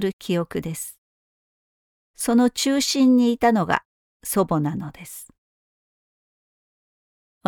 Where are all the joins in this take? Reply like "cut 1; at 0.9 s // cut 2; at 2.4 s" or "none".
none